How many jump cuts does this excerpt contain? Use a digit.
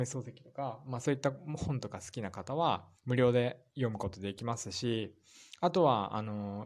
1